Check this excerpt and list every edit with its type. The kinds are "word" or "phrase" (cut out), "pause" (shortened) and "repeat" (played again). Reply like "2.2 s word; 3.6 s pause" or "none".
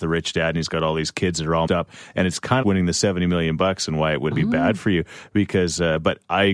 1.7 s word; 2.6 s phrase; 4.3 s word